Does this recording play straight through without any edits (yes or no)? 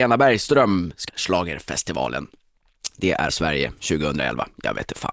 no